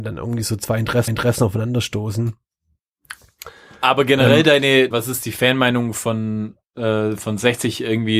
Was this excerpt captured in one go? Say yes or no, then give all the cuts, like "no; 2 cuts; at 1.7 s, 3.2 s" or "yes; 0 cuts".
no; 3 cuts; at 1.1 s, 4.9 s, 6.6 s